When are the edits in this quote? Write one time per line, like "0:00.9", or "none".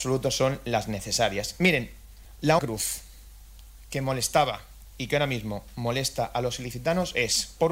0:02.6